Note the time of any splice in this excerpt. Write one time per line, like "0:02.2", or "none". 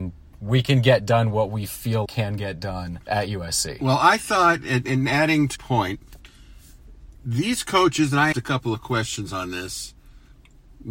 0:02.1
0:03.0
0:05.6
0:07.1
0:08.3